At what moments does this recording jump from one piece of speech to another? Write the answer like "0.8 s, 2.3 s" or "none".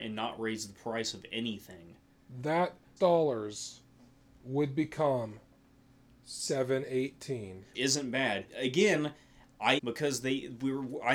3.0 s, 7.7 s, 8.5 s, 9.8 s